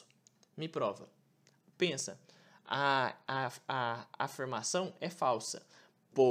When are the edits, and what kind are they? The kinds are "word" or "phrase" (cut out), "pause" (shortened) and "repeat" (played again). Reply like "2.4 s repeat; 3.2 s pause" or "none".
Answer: 3.3 s word